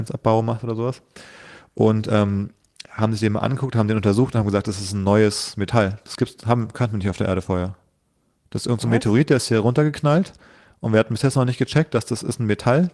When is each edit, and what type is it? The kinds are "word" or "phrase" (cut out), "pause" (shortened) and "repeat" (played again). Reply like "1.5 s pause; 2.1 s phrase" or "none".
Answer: none